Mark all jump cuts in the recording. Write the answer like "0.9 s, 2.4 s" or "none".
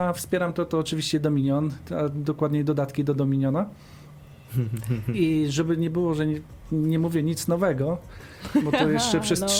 none